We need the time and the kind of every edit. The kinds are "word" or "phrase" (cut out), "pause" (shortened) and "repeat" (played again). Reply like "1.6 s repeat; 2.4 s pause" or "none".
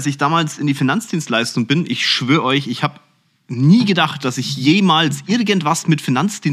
none